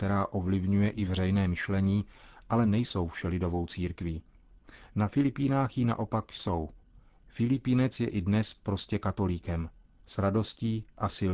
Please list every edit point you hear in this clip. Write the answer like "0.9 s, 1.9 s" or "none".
none